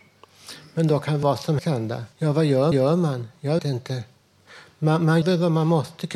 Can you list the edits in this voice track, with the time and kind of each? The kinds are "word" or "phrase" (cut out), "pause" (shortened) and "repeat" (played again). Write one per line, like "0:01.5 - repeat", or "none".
0:01.2 - word
0:01.6 - word
0:02.1 - pause
0:02.7 - repeat
0:03.6 - word
0:05.2 - word